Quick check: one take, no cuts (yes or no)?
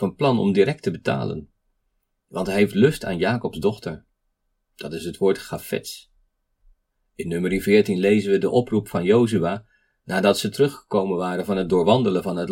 yes